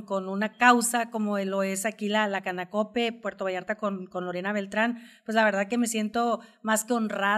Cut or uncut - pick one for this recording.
uncut